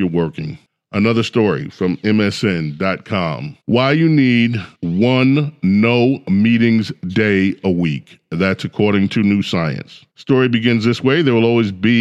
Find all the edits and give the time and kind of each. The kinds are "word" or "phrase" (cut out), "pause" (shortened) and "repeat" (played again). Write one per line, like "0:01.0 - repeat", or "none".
0:03.6 - pause
0:04.7 - pause
0:10.1 - pause